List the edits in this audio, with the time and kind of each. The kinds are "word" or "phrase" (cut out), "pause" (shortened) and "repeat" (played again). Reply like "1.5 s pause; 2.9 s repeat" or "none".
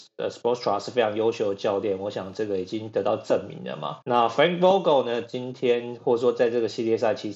4.0 s pause